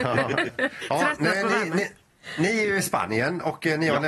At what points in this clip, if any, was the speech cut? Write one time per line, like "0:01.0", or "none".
none